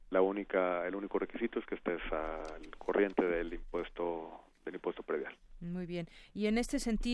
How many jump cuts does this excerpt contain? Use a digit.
0